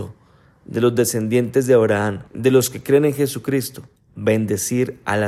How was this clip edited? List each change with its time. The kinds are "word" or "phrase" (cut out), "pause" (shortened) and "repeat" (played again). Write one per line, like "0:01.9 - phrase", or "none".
0:02.3 - pause
0:04.0 - pause